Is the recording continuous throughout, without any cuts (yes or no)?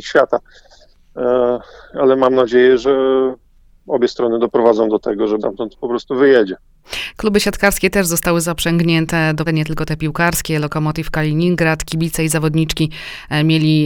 no